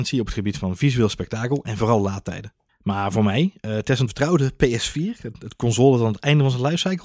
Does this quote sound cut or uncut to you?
cut